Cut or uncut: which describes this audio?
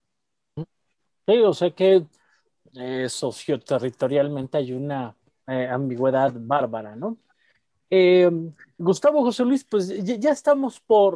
uncut